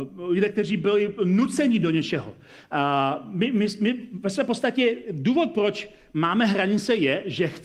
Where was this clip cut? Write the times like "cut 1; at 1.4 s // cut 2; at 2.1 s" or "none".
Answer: none